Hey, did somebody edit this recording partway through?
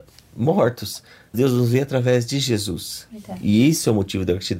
yes; 1 cut; at 1.3 s

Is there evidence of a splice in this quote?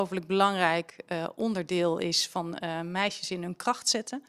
no; 0 cuts

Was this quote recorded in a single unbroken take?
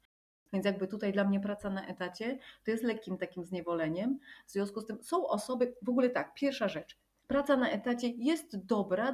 yes; 0 cuts

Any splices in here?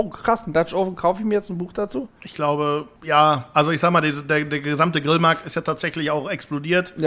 yes; 1 cut; at 2.9 s

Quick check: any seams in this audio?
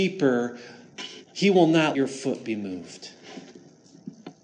yes; 1 cut; at 1.9 s

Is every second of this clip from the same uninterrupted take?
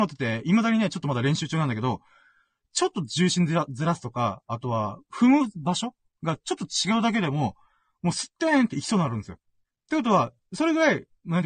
yes; 0 cuts

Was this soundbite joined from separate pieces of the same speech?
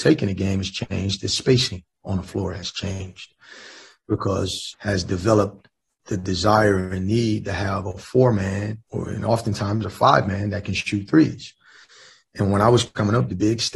yes; 2 cuts; at 4.7 s, 8.8 s

